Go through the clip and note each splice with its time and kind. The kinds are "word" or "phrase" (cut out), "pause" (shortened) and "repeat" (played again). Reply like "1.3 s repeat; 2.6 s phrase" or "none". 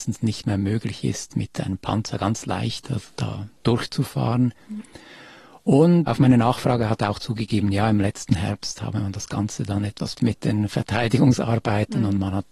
6.1 s word; 10.2 s word